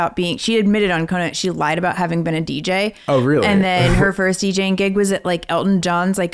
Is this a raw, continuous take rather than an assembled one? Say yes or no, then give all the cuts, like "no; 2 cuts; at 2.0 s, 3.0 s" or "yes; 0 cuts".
yes; 0 cuts